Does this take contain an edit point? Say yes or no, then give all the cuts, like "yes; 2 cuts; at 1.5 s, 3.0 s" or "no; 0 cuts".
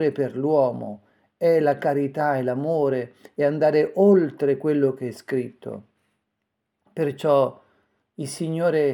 no; 0 cuts